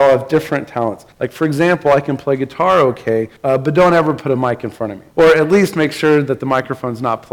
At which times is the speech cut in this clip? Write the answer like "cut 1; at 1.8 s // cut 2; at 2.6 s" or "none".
cut 1; at 1.1 s // cut 2; at 3.4 s // cut 3; at 5.1 s